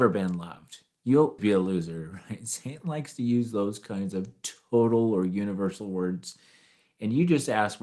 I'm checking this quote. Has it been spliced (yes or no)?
yes